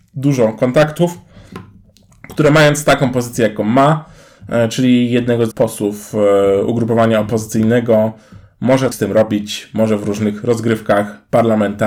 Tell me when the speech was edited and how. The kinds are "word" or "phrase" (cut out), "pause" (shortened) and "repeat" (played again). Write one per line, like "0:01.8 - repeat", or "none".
0:05.5 - word
0:08.9 - word